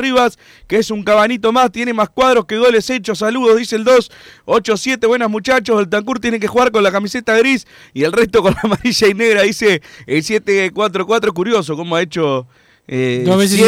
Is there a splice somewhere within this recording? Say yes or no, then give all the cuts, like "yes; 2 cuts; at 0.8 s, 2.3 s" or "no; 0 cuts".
no; 0 cuts